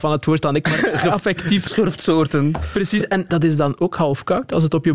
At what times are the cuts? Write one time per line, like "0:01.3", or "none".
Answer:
0:01.7
0:03.3